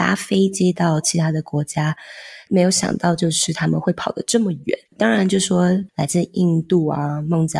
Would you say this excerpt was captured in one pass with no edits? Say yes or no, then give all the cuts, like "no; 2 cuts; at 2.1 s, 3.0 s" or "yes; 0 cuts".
no; 1 cut; at 4.9 s